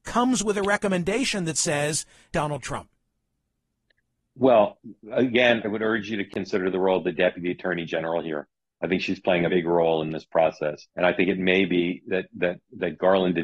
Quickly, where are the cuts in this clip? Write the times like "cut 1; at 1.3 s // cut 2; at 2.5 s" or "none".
cut 1; at 2.3 s // cut 2; at 5.6 s // cut 3; at 9.5 s // cut 4; at 10.9 s